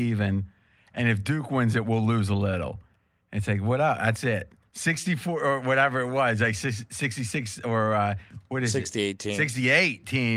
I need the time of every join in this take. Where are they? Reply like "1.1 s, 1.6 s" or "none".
none